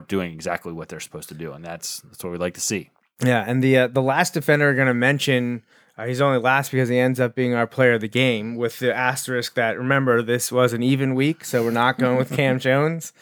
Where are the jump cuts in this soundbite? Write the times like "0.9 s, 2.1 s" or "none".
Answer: none